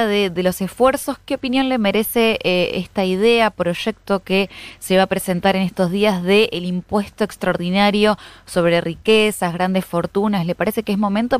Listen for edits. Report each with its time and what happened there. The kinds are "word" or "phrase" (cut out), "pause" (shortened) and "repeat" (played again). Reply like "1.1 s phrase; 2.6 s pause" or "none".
none

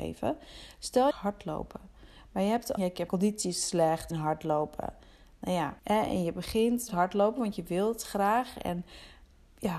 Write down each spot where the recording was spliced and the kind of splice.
1.1 s phrase; 2.8 s word; 3.1 s phrase; 4.1 s phrase; 5.8 s pause; 6.9 s phrase

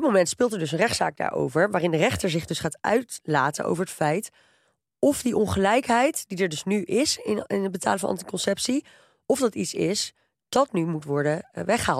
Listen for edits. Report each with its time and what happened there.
none

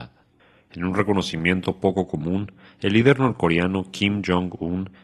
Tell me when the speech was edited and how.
none

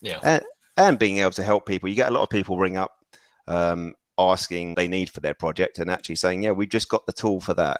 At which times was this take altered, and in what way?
4.7 s word

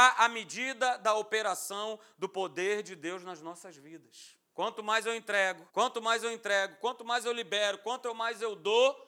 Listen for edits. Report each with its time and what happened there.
4.5 s pause; 5.7 s pause

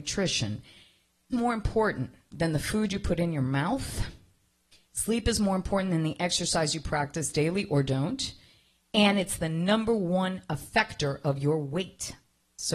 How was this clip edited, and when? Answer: 1.3 s phrase

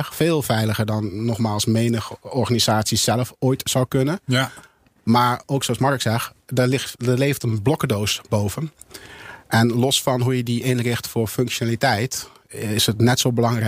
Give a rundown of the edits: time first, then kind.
none

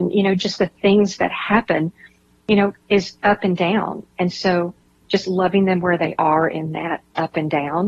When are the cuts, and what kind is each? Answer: none

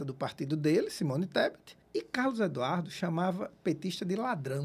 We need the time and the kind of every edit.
1.8 s pause

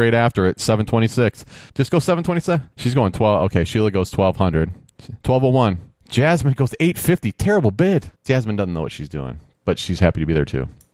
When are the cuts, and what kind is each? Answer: 1.7 s pause; 2.7 s pause; 5.2 s pause; 6.0 s pause; 8.2 s pause

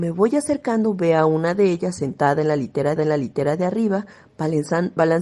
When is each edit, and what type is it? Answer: 3.0 s repeat

